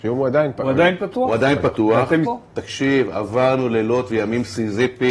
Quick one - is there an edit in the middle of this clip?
yes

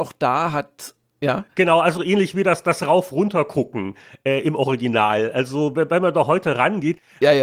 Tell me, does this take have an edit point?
no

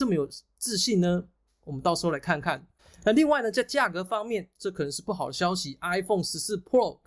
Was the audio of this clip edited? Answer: no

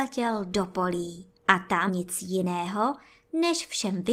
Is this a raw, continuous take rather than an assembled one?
no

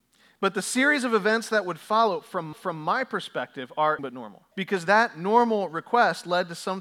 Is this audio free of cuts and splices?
no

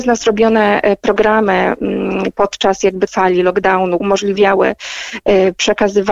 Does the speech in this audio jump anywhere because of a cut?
yes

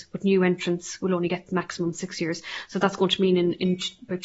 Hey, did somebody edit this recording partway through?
no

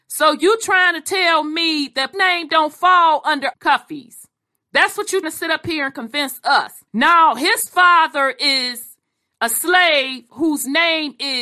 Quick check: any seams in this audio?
yes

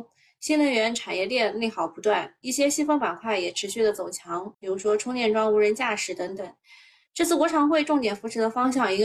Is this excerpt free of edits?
no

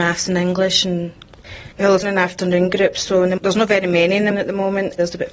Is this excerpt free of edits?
no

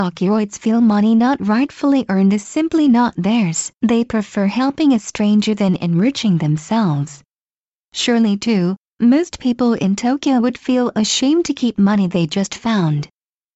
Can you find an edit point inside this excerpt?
yes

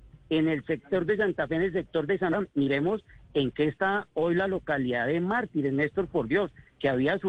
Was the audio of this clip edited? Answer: no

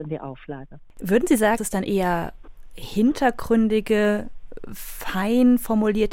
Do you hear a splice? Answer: yes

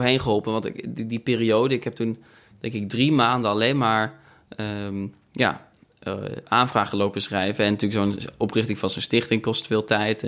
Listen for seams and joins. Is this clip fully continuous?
yes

